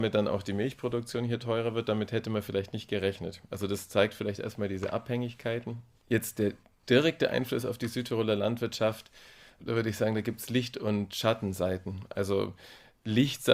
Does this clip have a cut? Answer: no; 0 cuts

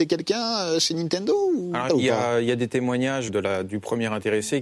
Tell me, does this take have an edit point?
yes; 2 cuts; at 1.9 s, 3.3 s

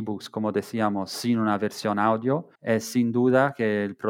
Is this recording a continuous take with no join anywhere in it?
no; 1 cut; at 2.6 s

